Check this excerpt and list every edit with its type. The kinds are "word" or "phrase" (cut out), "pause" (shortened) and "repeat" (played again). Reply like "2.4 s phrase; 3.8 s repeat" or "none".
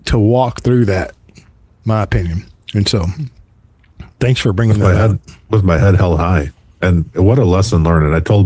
none